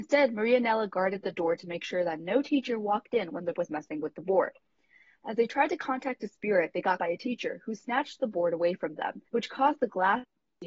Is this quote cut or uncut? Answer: cut